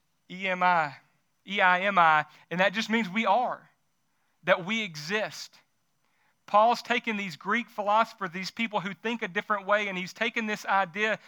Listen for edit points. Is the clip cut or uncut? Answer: uncut